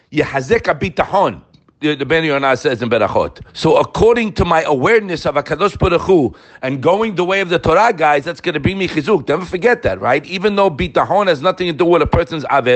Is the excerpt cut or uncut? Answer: cut